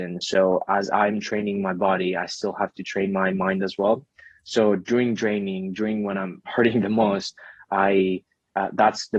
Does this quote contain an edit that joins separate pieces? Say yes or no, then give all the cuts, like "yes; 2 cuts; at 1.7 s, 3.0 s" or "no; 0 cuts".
no; 0 cuts